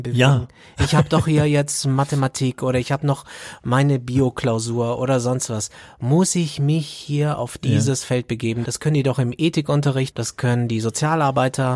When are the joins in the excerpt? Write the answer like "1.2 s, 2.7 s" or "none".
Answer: 10.1 s